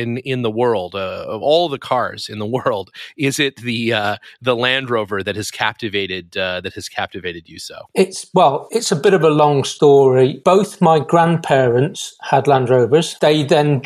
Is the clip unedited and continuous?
yes; 0 cuts

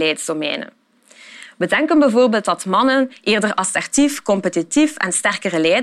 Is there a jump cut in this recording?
no; 0 cuts

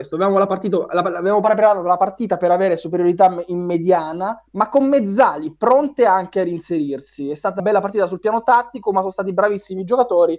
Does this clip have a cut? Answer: yes; 2 cuts; at 4.5 s, 7.6 s

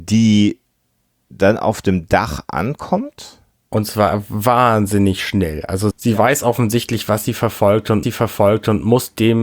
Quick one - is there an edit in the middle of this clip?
yes; 2 cuts; at 5.9 s, 8.0 s

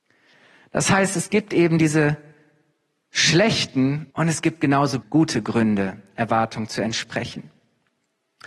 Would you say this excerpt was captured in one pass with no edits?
no; 2 cuts; at 4.1 s, 5.0 s

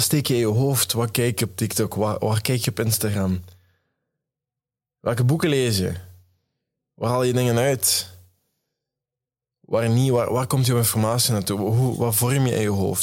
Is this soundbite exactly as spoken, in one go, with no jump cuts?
yes; 0 cuts

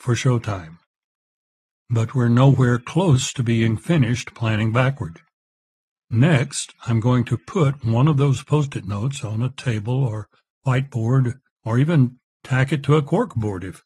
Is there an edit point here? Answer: no; 0 cuts

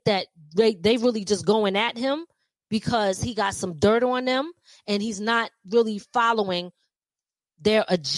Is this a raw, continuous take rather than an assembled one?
yes; 0 cuts

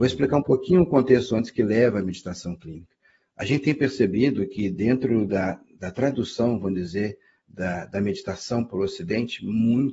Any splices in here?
no; 0 cuts

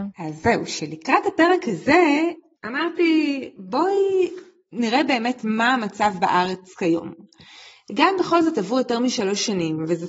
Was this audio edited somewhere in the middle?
no; 0 cuts

